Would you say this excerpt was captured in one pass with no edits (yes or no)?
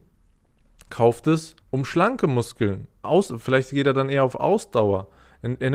no